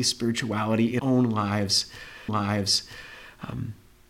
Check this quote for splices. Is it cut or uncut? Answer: cut